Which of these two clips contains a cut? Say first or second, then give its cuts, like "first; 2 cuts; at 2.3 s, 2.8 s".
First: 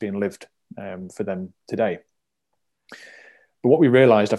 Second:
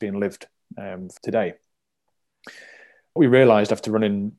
second; 2 cuts; at 1.2 s, 3.2 s